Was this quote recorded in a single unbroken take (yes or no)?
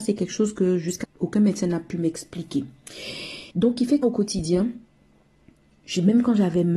no